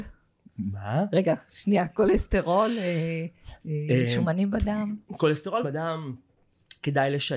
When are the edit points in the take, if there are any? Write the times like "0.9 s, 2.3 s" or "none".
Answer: 5.6 s

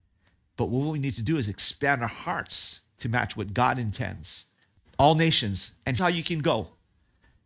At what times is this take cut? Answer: 2.9 s, 6.0 s

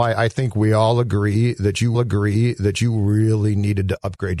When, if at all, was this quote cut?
1.9 s

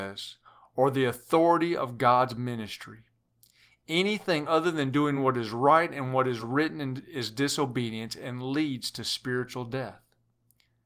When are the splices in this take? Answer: none

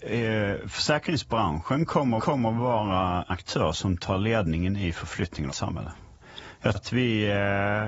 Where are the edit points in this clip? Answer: 2.2 s, 3.3 s, 5.5 s, 6.7 s

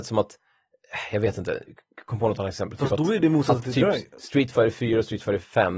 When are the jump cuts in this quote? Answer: none

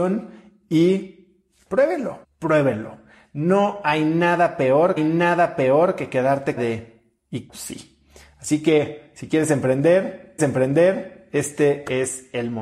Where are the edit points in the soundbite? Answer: 2.2 s, 5.0 s, 6.6 s, 7.5 s, 10.4 s

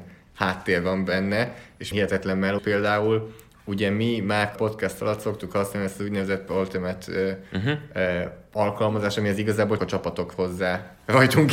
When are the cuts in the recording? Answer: 1.9 s, 2.6 s, 4.6 s, 6.5 s, 9.8 s, 10.3 s

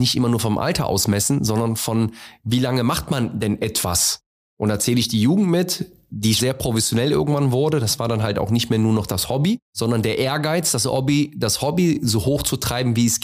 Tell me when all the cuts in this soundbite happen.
6.4 s

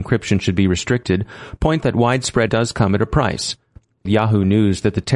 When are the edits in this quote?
1.8 s, 2.5 s, 4.1 s

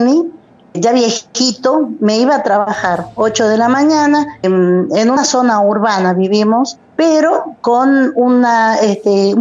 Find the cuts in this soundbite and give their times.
4.4 s

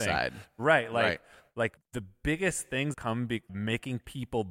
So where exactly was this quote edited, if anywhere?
1.8 s, 2.9 s, 3.5 s

